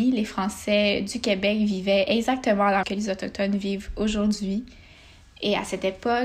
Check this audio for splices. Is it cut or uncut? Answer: cut